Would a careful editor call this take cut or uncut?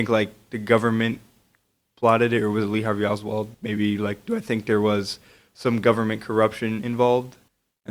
cut